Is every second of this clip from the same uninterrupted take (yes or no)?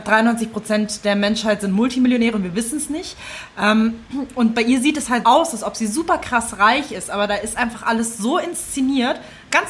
no